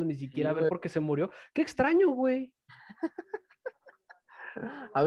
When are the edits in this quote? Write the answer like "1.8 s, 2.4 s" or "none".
none